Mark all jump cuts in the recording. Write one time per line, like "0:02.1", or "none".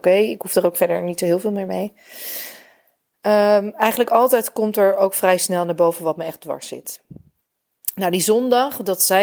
none